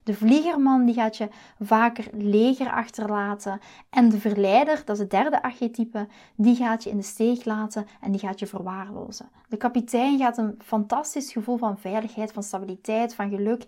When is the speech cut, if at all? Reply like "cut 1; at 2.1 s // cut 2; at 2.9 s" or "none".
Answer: none